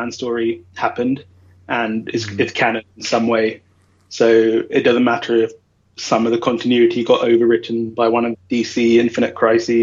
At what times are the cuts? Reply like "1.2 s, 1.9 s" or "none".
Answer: 8.3 s